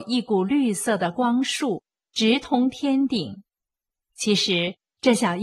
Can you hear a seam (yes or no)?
no